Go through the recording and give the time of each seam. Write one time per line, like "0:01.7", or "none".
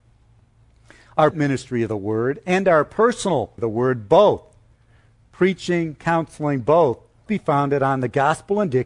0:01.3
0:03.6
0:07.3